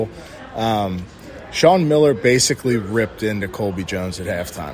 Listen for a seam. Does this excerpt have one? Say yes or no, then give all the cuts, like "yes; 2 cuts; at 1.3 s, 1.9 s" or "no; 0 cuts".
no; 0 cuts